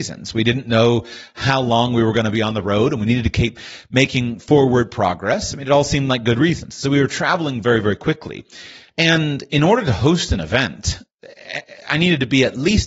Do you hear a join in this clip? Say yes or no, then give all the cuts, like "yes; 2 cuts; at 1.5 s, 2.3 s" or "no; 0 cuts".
no; 0 cuts